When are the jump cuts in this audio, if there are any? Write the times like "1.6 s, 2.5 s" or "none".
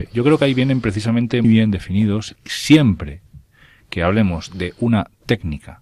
1.4 s, 2.4 s

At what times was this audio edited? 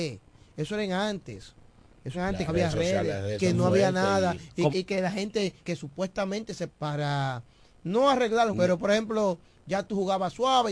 2.1 s, 2.5 s, 3.4 s, 4.7 s, 5.6 s, 6.7 s, 8.5 s

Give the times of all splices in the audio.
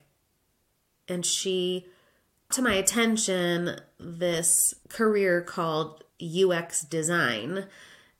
2.5 s, 6.1 s

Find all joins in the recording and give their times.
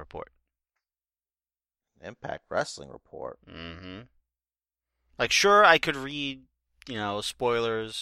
none

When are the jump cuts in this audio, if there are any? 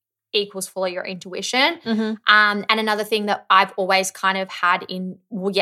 none

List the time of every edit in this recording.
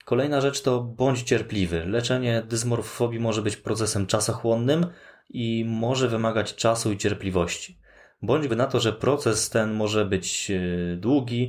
8.5 s

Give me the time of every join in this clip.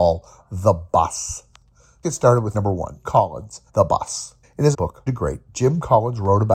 2.0 s, 2.5 s, 3.0 s, 3.7 s, 4.4 s, 4.7 s, 5.1 s

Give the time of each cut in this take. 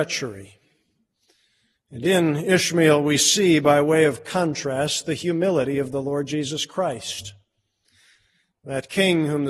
none

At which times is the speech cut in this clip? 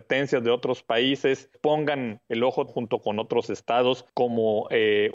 1.5 s, 2.7 s, 4.1 s

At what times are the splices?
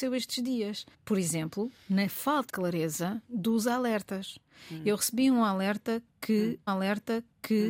0.9 s, 2.5 s, 3.2 s, 6.7 s

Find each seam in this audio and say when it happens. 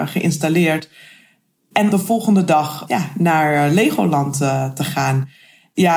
1.9 s

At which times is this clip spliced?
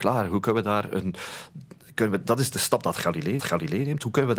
3.4 s

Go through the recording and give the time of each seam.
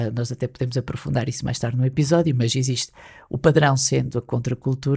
none

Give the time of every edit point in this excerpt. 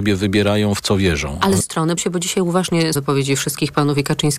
1.6 s, 2.0 s, 2.9 s

